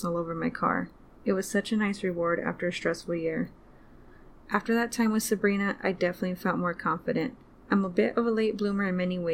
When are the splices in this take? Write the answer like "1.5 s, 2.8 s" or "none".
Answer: 1.0 s, 7.5 s